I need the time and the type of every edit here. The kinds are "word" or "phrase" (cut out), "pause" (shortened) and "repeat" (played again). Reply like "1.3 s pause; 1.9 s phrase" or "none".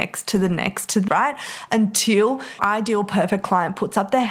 1.1 s word; 2.6 s word

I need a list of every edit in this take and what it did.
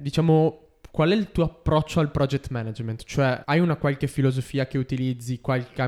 3.4 s word

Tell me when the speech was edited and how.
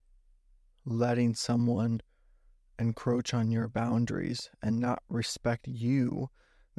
none

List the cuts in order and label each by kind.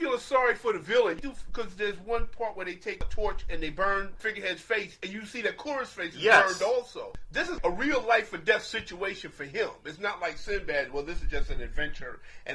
none

